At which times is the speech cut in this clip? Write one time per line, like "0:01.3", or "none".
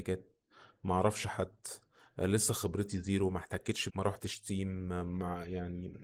0:03.9